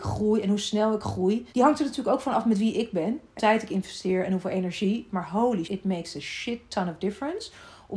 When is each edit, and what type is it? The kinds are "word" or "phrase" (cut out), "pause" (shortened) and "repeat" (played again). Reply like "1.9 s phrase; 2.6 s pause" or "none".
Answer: 1.5 s pause; 3.4 s word; 5.6 s word